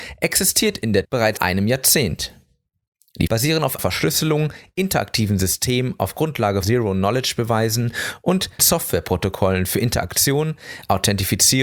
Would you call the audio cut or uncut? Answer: cut